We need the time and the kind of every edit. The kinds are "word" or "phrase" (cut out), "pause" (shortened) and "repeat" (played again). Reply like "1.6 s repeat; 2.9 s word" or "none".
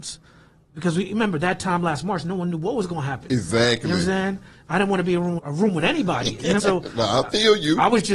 5.4 s word; 6.6 s word

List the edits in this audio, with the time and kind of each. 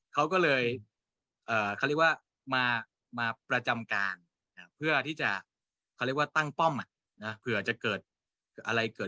none

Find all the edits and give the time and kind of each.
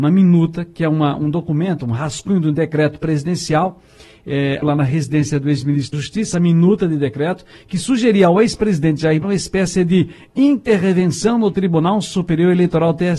4.6 s word; 5.9 s word; 6.3 s word; 9.2 s word

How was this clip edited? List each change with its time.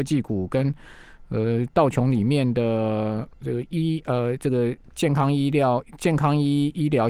3.3 s pause

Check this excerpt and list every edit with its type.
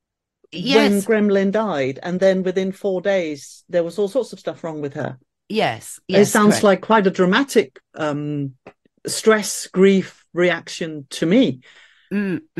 none

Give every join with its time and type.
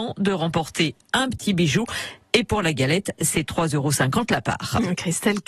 none

